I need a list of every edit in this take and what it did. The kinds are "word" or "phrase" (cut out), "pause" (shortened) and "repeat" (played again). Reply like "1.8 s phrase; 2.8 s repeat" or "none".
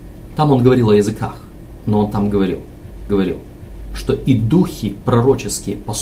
3.1 s repeat

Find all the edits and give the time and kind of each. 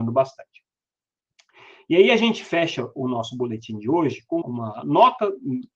4.4 s word

